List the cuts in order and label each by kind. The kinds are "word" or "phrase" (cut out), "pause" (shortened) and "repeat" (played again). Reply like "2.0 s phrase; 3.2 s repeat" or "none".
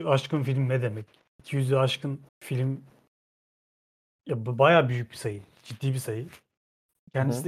2.3 s pause

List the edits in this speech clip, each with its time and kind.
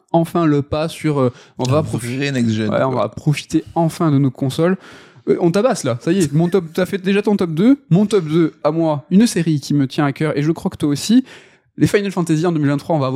none

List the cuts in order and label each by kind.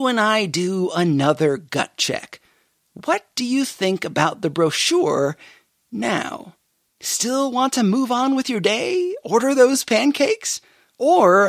none

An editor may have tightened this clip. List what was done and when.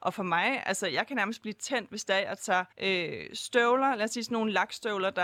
2.7 s pause

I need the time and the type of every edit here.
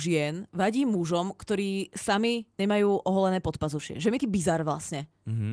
4.2 s phrase

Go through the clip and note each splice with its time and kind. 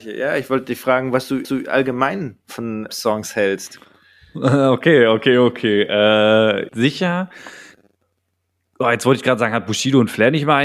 1.4 s repeat; 2.9 s phrase; 6.7 s phrase

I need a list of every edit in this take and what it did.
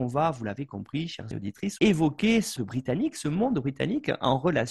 1.3 s word; 1.8 s word; 2.6 s word

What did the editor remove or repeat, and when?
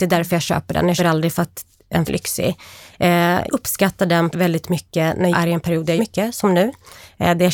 1.0 s word; 2.1 s word; 3.5 s word; 4.3 s word; 5.3 s word; 6.0 s word

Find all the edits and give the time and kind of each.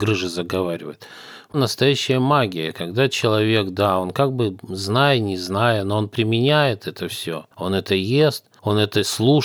7.5 s pause

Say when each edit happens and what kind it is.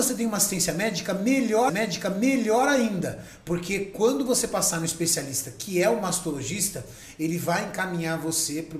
1.7 s repeat

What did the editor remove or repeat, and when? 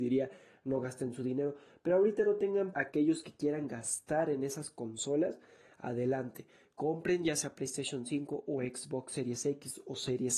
2.7 s word

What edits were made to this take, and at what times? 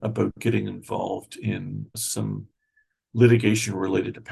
1.9 s word

